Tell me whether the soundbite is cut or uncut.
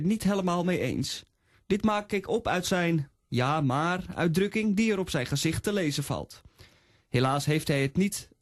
uncut